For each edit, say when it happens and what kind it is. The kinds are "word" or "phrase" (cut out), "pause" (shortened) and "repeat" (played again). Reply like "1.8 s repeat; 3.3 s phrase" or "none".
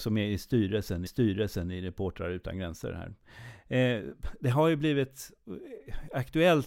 1.1 s repeat